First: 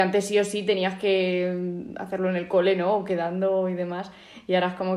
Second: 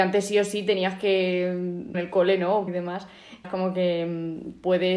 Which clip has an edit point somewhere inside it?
second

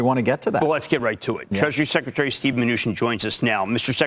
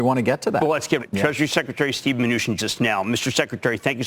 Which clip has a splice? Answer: second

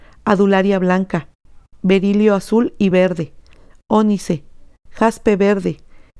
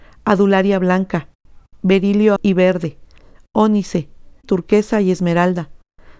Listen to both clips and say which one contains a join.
second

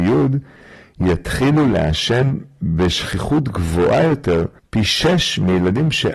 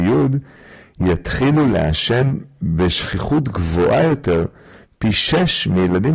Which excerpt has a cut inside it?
first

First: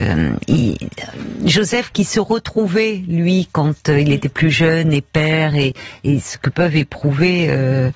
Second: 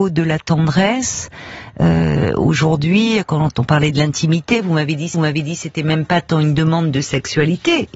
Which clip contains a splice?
second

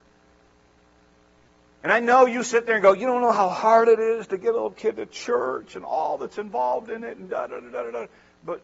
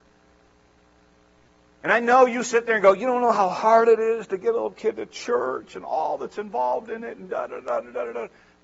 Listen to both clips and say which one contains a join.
first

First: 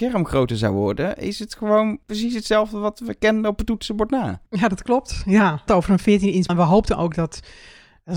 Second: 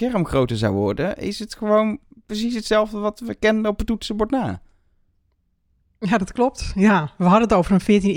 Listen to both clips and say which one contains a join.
first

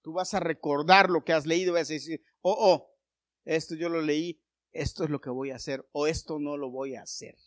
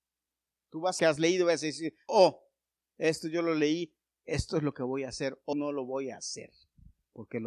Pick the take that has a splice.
second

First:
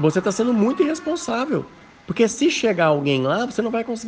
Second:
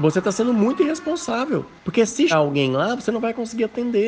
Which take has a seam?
second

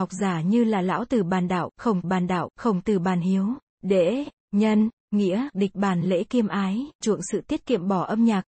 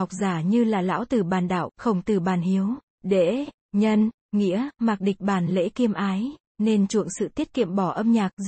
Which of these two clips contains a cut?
first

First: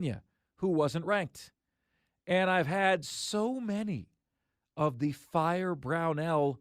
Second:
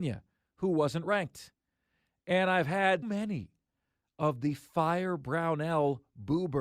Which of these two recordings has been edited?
second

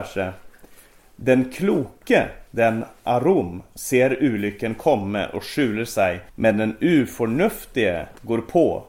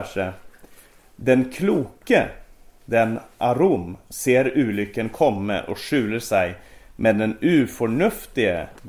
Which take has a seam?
first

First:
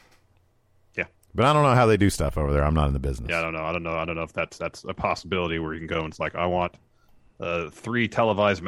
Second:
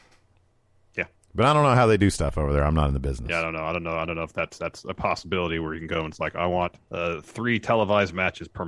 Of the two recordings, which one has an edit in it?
second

